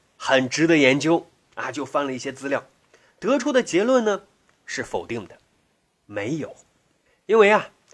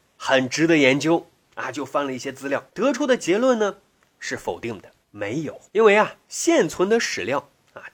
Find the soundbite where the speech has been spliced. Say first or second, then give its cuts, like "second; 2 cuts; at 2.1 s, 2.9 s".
second; 4 cuts; at 2.7 s, 5.0 s, 5.7 s, 6.2 s